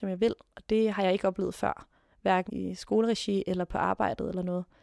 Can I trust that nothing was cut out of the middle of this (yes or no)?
no